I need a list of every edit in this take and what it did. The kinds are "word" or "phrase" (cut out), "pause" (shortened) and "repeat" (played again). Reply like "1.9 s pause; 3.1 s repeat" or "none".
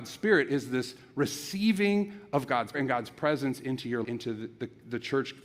2.7 s word; 4.0 s phrase